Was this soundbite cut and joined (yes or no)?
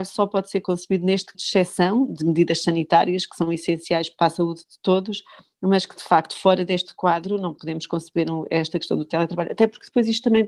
yes